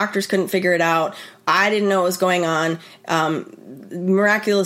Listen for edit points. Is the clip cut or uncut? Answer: uncut